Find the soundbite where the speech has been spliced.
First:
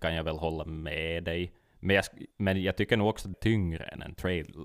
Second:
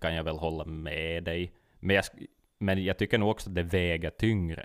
first; 2 cuts; at 2.3 s, 3.3 s

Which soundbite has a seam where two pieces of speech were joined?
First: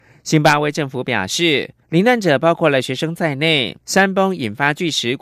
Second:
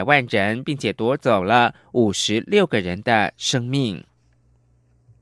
first; 2 cuts; at 1.8 s, 3.8 s

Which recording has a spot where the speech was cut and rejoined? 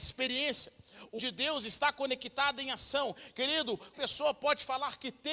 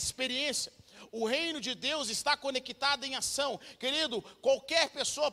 first; 2 cuts; at 1.2 s, 3.9 s

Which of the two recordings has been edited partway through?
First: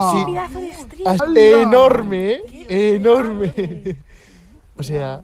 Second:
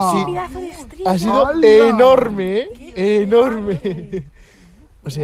first; 1 cut; at 1.2 s

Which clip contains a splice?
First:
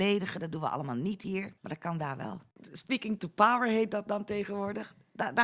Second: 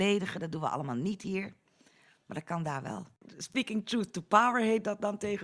first; 2 cuts; at 1.6 s, 3.2 s

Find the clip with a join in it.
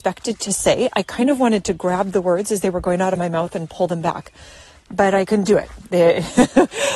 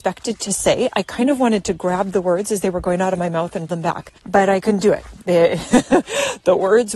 second; 2 cuts; at 3.7 s, 4.2 s

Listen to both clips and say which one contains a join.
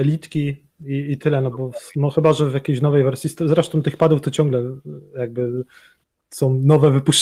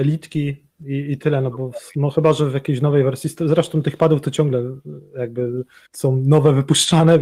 second; 1 cut; at 5.9 s

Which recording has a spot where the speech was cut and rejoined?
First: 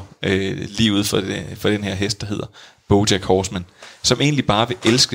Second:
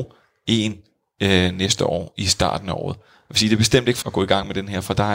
second; 1 cut; at 4.0 s

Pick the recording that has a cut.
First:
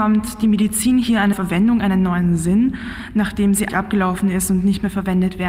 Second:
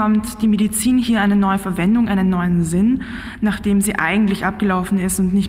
first; 2 cuts; at 1.3 s, 3.7 s

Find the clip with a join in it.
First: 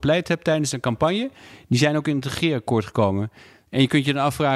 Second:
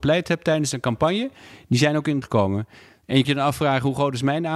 second; 2 cuts; at 2.2 s, 3.2 s

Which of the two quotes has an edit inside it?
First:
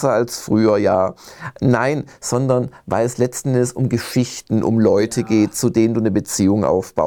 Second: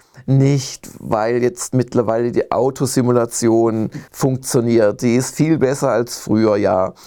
second; 1 cut; at 4.1 s

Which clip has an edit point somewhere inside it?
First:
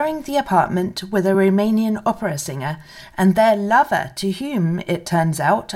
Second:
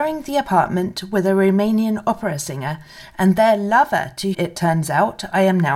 second; 1 cut; at 4.3 s

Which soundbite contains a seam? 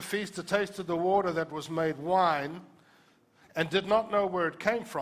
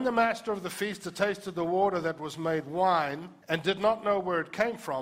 second; 1 cut; at 3.4 s

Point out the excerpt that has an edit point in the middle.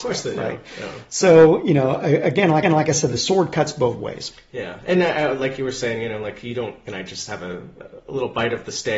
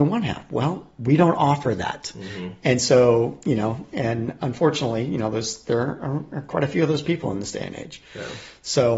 first; 2 cuts; at 2.6 s, 6.9 s

